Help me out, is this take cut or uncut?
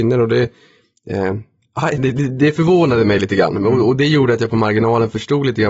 uncut